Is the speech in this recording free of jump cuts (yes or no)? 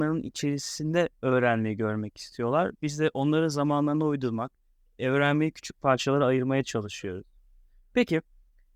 yes